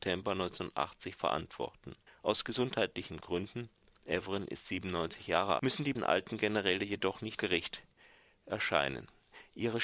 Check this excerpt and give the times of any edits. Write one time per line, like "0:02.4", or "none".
0:02.1
0:03.9
0:05.6
0:05.9
0:07.4

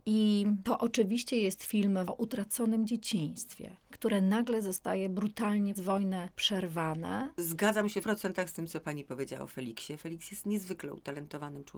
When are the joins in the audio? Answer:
0:02.1
0:03.9
0:05.8
0:08.0

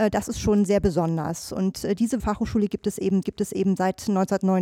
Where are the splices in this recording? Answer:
0:02.2
0:03.2

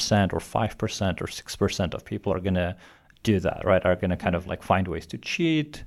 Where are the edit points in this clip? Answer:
none

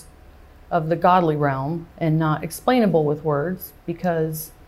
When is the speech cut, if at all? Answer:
0:01.9

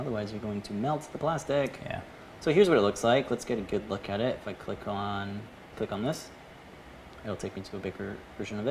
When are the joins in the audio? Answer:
0:05.7

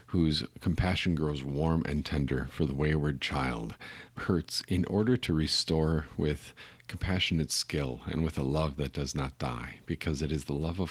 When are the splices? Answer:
0:04.2

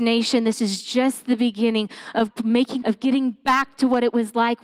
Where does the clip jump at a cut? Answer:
0:02.3
0:02.8

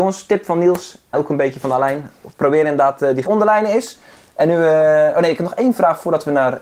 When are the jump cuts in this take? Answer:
0:01.1
0:03.3

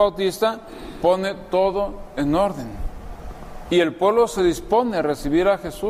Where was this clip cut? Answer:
none

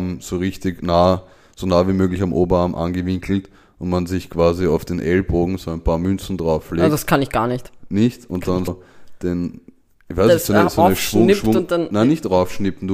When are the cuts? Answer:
0:08.7

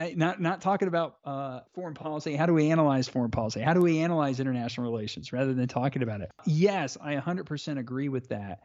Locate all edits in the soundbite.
0:01.7

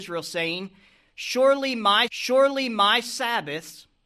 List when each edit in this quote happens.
0:02.1

